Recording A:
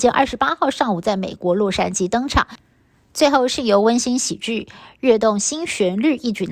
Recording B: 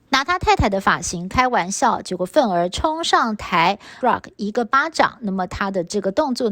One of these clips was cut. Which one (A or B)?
B